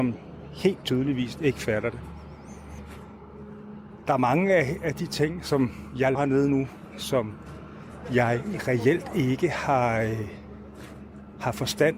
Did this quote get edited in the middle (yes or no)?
yes